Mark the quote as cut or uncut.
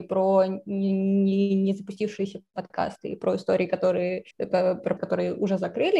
cut